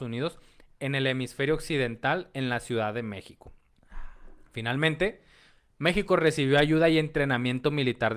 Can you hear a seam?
no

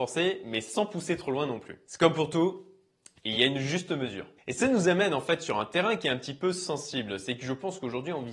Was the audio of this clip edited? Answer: no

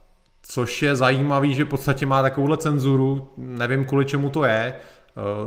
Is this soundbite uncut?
yes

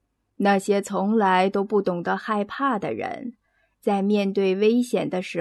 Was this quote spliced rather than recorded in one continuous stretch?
no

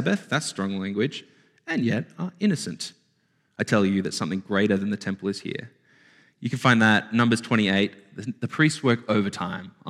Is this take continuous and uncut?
yes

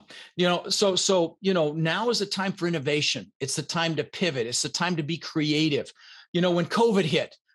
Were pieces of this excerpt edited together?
no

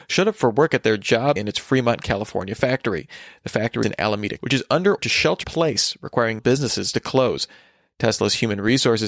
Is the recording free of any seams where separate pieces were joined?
no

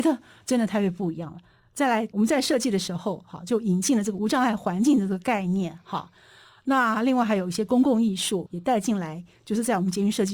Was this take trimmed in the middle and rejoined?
no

